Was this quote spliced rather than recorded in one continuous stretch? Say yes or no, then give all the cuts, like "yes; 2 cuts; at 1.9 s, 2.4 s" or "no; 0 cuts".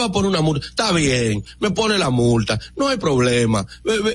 no; 0 cuts